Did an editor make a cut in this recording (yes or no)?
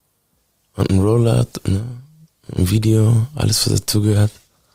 no